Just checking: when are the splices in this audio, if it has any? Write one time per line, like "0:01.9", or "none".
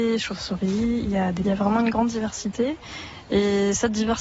0:01.4